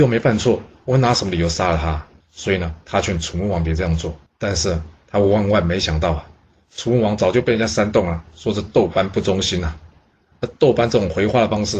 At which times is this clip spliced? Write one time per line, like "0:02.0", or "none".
0:02.2
0:04.3